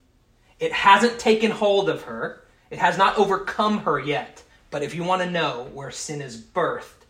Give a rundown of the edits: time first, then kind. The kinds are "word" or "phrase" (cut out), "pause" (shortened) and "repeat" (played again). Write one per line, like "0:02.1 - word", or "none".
0:04.5 - pause